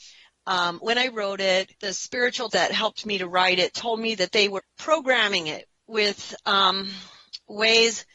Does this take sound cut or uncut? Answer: cut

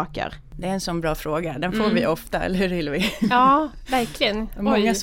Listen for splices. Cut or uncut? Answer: uncut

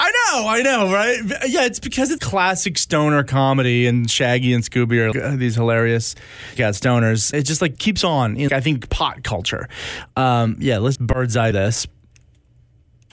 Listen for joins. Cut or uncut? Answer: cut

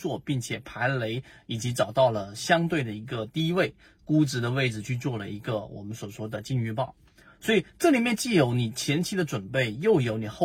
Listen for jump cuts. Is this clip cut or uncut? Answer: uncut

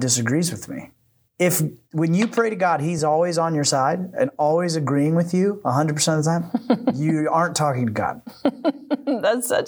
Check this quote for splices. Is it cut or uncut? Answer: uncut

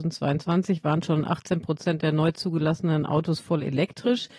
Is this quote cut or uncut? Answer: uncut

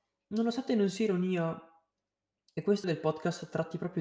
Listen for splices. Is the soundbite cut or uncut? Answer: cut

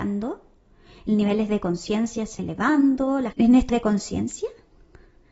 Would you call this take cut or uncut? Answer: cut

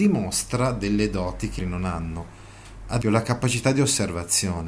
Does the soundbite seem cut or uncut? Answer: cut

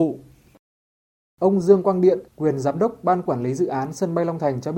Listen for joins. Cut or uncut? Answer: cut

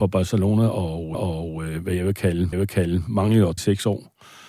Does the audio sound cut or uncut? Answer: cut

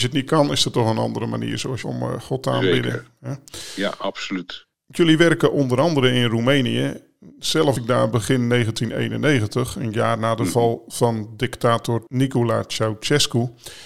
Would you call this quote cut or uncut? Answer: cut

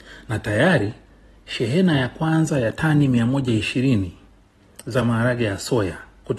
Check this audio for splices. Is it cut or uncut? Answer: uncut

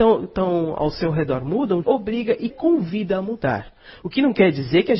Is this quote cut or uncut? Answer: cut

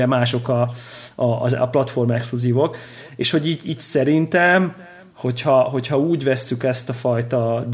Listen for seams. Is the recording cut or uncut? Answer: uncut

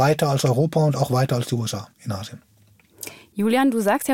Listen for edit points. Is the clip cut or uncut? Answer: cut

